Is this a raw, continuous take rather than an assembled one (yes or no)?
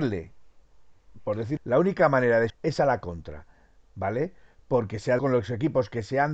no